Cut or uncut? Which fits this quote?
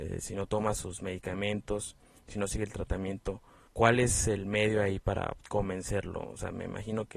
uncut